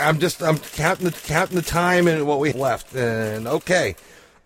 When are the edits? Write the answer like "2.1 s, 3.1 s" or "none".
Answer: 1.1 s, 2.5 s